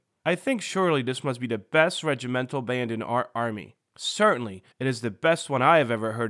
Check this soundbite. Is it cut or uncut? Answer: cut